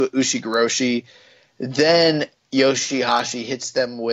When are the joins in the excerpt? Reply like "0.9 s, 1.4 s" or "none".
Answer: none